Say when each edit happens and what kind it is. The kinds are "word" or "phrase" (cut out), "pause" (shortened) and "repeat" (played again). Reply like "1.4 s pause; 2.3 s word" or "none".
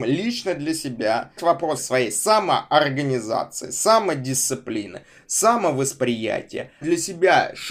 1.4 s word; 1.8 s word; 6.8 s word